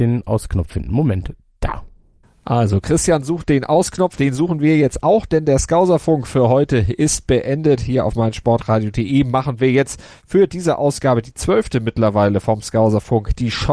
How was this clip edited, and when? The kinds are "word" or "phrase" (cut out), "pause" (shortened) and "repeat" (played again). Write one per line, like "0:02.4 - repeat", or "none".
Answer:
0:02.2 - pause